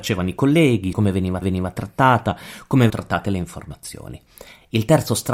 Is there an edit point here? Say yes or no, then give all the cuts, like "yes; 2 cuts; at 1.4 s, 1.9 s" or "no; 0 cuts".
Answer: yes; 3 cuts; at 0.9 s, 1.4 s, 2.9 s